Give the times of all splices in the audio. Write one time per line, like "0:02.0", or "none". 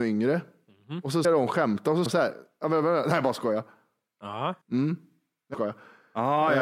0:01.2
0:02.1
0:04.6
0:05.5